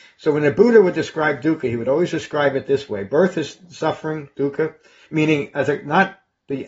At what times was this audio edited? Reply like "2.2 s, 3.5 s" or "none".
none